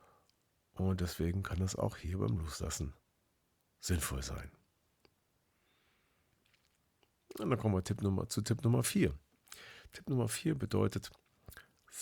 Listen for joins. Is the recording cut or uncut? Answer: uncut